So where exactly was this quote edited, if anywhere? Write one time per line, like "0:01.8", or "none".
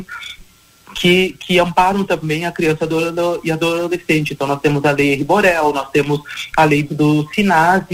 0:06.9